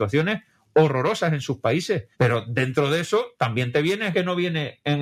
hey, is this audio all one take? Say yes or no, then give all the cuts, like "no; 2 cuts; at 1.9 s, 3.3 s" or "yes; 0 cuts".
no; 2 cuts; at 2.1 s, 4.1 s